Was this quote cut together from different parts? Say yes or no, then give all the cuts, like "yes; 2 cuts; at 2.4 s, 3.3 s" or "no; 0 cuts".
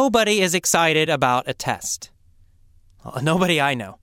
no; 0 cuts